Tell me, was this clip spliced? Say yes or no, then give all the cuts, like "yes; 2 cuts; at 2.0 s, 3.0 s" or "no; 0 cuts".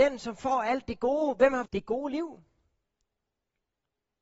yes; 1 cut; at 1.7 s